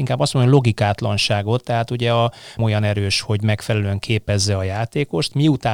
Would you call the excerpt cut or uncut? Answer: cut